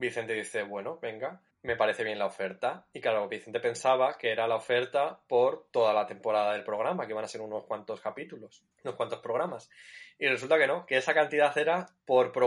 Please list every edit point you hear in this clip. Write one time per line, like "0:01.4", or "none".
0:01.5
0:08.7